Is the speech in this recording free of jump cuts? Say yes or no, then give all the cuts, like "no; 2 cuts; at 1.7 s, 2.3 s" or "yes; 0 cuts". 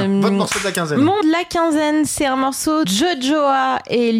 no; 2 cuts; at 1.2 s, 2.8 s